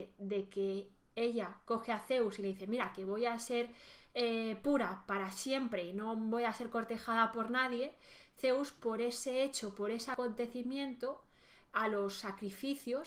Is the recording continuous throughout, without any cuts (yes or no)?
no